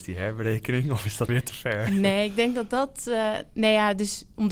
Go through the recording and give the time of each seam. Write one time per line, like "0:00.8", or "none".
0:01.3